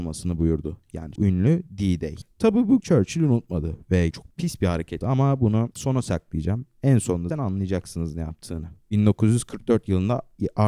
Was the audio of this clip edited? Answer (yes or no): yes